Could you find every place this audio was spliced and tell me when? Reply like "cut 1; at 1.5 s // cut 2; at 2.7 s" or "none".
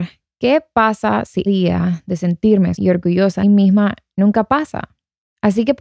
cut 1; at 1.5 s // cut 2; at 2.8 s // cut 3; at 3.4 s